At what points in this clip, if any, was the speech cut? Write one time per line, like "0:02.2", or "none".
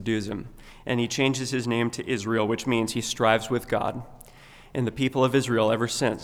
none